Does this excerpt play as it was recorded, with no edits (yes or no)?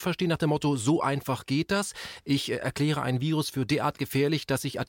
yes